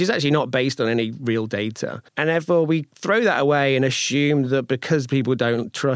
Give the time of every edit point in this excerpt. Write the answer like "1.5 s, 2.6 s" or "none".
2.1 s